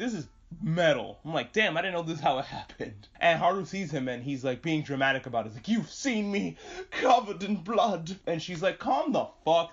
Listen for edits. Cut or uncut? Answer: uncut